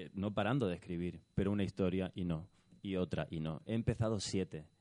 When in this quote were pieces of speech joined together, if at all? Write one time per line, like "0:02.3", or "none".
none